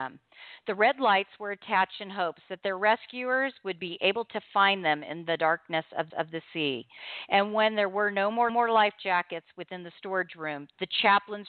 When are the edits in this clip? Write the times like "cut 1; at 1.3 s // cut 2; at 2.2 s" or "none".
cut 1; at 6.1 s // cut 2; at 8.5 s